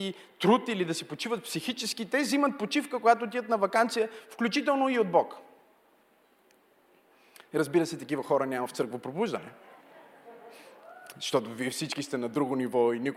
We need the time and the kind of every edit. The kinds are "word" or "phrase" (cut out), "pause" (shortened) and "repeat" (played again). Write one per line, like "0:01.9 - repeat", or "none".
none